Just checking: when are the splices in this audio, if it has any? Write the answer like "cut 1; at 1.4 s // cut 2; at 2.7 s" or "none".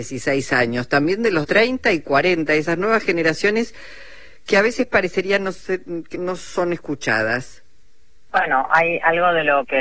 cut 1; at 1.4 s // cut 2; at 6.1 s